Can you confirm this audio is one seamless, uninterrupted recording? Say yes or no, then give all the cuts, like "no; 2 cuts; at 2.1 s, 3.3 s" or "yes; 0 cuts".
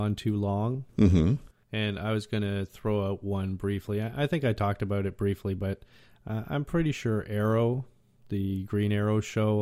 yes; 0 cuts